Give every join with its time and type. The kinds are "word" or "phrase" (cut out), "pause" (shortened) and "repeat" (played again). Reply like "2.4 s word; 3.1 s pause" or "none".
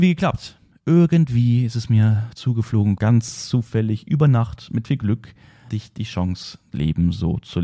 3.0 s word; 4.8 s word; 5.7 s word; 6.7 s word